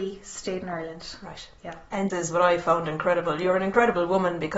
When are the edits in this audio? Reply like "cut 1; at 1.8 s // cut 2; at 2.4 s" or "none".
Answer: cut 1; at 2.1 s

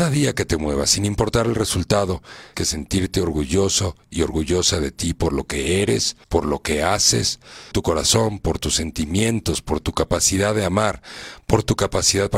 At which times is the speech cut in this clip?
cut 1; at 2.5 s // cut 2; at 6.2 s // cut 3; at 7.7 s

